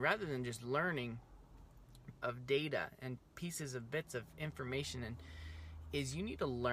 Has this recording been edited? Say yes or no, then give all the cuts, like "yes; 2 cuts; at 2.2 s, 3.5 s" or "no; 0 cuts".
yes; 2 cuts; at 2.2 s, 3.3 s